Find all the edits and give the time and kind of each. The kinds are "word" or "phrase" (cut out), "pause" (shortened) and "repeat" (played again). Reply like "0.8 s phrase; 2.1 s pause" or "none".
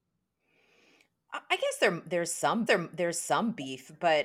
2.7 s repeat